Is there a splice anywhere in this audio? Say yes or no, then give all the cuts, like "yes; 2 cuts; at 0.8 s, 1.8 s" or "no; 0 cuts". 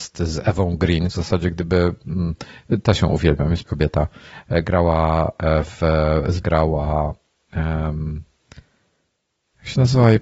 yes; 3 cuts; at 1.1 s, 3.7 s, 6.4 s